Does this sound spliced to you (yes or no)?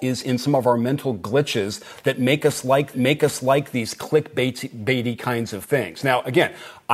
yes